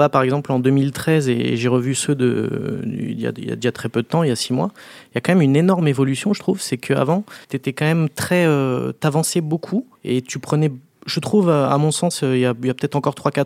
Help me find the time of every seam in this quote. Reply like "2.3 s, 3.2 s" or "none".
7.4 s, 9.9 s